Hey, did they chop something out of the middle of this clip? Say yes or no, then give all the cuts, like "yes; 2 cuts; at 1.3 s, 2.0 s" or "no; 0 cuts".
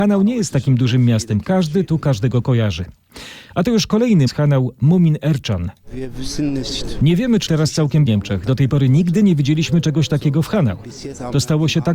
yes; 3 cuts; at 4.3 s, 7.5 s, 8.1 s